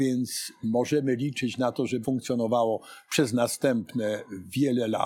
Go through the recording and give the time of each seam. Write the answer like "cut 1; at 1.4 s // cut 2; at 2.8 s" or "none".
cut 1; at 2.0 s